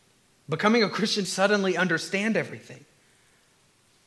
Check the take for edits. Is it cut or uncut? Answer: cut